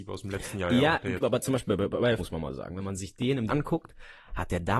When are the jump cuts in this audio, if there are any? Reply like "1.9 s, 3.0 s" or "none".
1.2 s, 2.2 s, 3.5 s

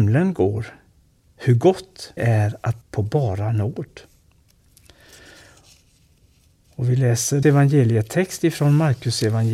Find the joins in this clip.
2.2 s, 2.8 s, 7.4 s

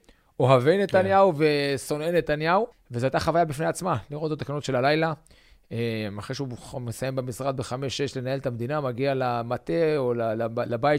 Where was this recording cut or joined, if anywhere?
2.7 s, 4.4 s

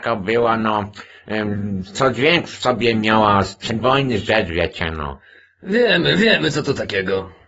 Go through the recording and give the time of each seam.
none

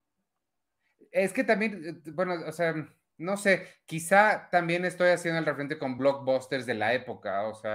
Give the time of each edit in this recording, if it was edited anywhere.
none

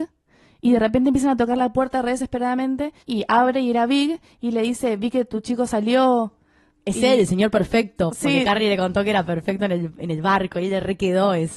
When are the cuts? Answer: 3.0 s

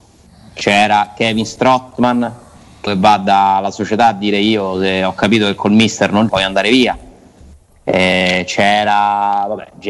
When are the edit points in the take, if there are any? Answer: 2.9 s, 6.3 s

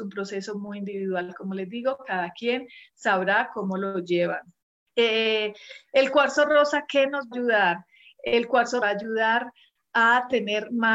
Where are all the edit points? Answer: 4.6 s, 7.3 s, 8.8 s

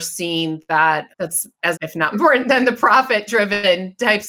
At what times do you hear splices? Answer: 1.1 s, 1.7 s, 2.1 s

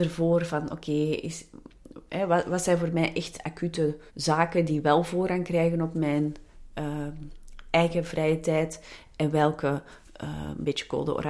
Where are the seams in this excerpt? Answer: 4.1 s

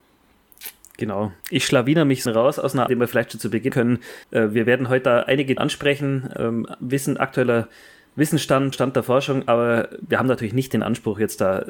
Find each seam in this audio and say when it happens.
1.4 s, 2.3 s, 2.9 s, 3.7 s, 4.2 s, 5.6 s, 8.7 s

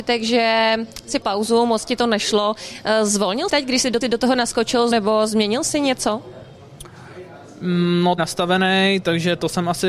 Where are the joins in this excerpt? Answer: 1.2 s, 3.5 s, 4.0 s, 4.9 s, 8.2 s

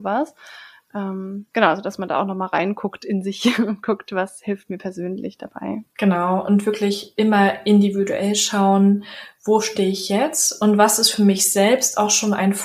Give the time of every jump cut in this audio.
5.9 s

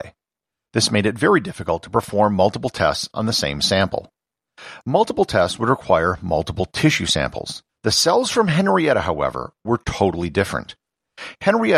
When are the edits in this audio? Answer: 7.7 s

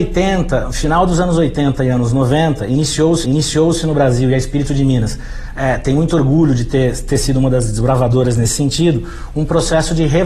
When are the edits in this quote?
3.2 s

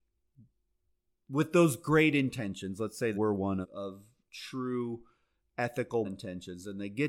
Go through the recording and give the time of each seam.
3.1 s, 3.6 s, 6.0 s

